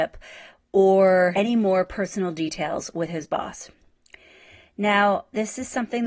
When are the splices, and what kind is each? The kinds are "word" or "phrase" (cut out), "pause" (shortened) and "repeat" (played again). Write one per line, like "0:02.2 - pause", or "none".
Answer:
0:01.3 - word